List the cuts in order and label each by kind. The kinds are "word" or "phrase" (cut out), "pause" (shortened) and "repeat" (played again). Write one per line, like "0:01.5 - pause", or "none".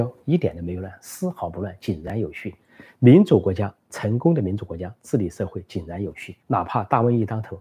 0:06.4 - pause

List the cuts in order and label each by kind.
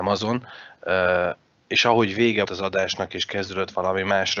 0:02.4 - word

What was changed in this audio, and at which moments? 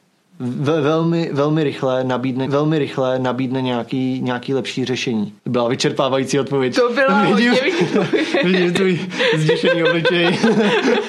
0:02.5 - repeat
0:05.4 - pause
0:07.7 - word

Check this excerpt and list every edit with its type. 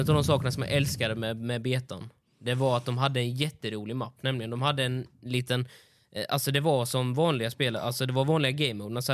none

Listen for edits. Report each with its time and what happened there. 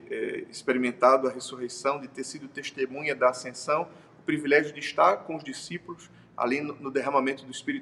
none

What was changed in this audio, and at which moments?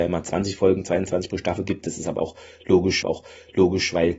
0:03.0 - repeat

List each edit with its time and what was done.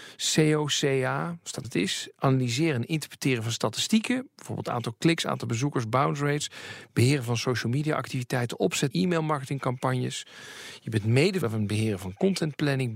0:01.6 - phrase
0:08.9 - phrase
0:11.4 - phrase

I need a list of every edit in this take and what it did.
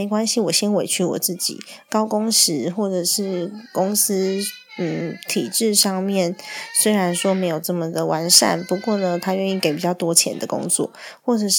none

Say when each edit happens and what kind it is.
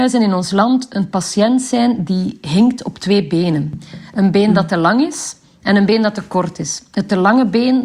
none

